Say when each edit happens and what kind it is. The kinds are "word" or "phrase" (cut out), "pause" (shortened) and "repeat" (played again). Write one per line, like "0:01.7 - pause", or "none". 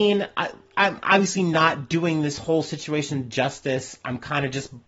none